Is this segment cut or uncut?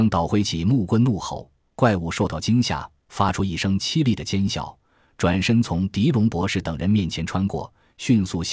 uncut